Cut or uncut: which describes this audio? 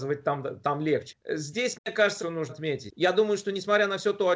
cut